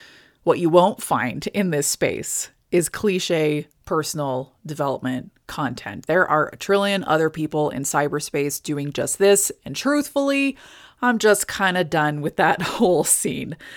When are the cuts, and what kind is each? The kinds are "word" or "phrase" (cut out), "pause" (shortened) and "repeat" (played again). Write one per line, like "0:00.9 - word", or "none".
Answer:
none